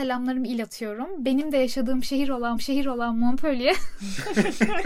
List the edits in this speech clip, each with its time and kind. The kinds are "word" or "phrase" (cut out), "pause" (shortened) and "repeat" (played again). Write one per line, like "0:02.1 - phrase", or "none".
0:02.6 - repeat

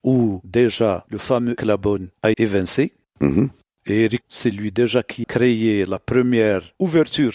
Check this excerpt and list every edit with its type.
0:01.6 - word
0:02.3 - word
0:04.2 - word
0:05.2 - word

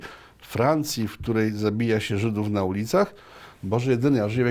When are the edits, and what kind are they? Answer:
none

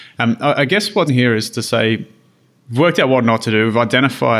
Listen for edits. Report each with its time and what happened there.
0:01.1 - word

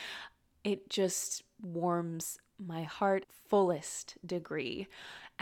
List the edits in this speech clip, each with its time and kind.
0:03.2 - phrase

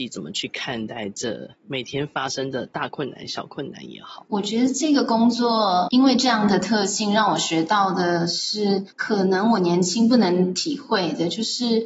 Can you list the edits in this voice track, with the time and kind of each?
0:04.3 - pause
0:05.9 - word

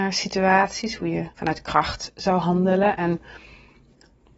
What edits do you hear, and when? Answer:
0:01.3 - pause

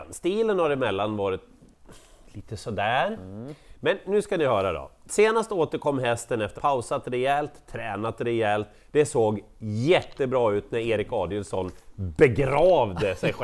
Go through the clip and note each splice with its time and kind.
0:06.6 - word

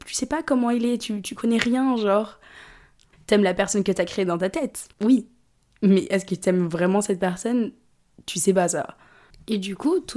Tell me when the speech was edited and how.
0:04.9 - pause

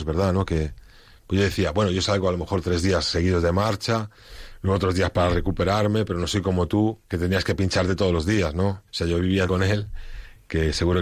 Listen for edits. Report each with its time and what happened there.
0:07.0 - pause
0:08.9 - pause
0:09.5 - phrase

